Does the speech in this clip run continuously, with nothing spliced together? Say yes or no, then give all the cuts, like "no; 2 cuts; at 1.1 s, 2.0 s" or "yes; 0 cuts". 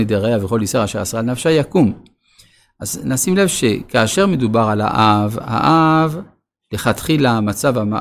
yes; 0 cuts